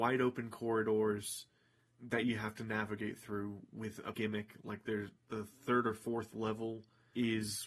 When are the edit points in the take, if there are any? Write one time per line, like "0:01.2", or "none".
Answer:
0:04.1
0:05.2